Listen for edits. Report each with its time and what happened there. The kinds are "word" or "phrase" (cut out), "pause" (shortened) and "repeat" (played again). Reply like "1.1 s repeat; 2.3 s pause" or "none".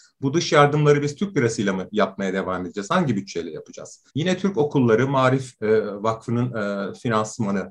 4.1 s pause